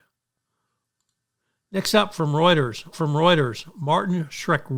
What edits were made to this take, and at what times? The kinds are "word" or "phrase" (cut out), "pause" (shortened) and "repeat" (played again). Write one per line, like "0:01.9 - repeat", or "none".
0:02.9 - repeat